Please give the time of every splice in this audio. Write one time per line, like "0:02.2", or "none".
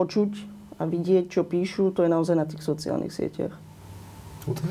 none